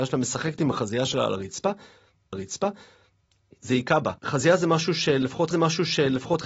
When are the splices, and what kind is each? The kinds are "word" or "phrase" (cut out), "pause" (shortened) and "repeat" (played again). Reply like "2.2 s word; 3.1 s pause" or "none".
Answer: 2.3 s repeat; 4.2 s pause; 5.5 s repeat